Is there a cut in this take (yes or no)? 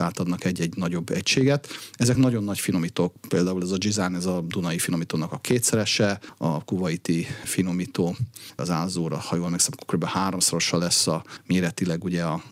no